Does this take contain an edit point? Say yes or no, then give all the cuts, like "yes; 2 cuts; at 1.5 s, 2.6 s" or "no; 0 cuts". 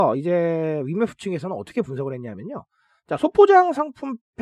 no; 0 cuts